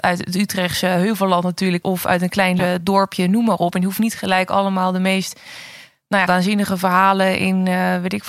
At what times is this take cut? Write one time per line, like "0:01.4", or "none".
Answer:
0:01.8
0:02.6
0:06.3